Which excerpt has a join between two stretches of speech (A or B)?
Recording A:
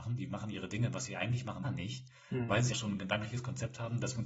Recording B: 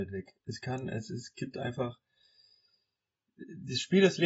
A